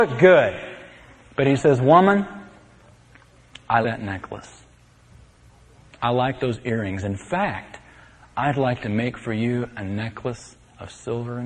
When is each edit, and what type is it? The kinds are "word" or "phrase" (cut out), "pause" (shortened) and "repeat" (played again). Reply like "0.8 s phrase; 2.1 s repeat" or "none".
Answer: 3.8 s word